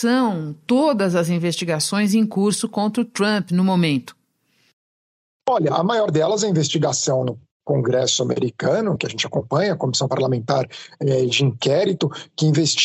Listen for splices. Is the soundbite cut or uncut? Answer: cut